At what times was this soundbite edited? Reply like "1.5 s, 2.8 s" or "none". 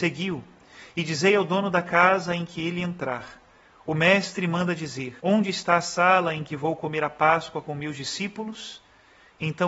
5.2 s